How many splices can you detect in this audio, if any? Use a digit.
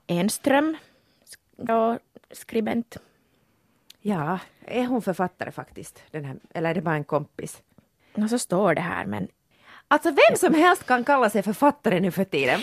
1